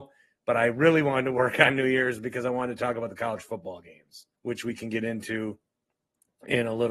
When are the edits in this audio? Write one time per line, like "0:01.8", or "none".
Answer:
0:04.4